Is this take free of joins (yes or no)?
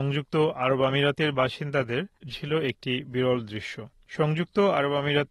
no